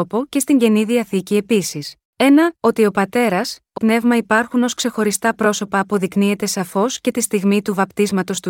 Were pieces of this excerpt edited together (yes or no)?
yes